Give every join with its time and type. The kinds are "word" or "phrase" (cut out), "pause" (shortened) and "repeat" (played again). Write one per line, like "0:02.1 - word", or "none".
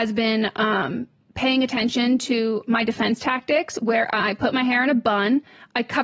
none